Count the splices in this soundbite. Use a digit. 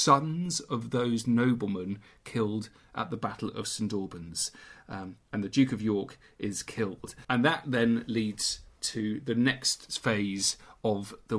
2